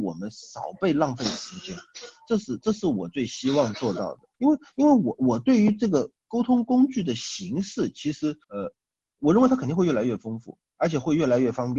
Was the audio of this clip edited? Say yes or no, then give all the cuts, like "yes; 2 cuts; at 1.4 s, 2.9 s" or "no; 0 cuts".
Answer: yes; 4 cuts; at 4.3 s, 6.2 s, 8.4 s, 10.7 s